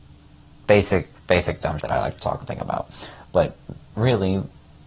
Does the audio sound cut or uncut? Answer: cut